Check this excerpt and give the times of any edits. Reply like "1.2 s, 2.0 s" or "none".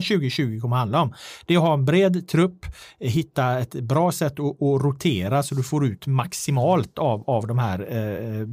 none